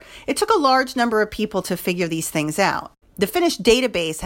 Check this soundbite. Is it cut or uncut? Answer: uncut